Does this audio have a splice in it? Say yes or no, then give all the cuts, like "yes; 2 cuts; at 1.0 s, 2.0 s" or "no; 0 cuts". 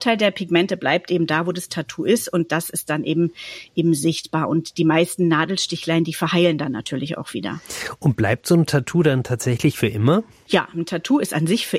no; 0 cuts